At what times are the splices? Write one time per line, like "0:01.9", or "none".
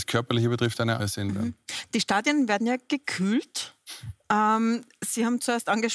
0:01.0